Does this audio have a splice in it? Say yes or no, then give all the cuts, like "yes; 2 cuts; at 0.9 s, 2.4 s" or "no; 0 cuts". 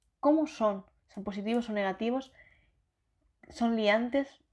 no; 0 cuts